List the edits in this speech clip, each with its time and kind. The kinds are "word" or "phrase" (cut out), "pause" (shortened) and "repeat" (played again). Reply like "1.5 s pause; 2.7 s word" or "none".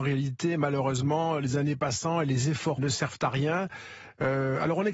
2.8 s word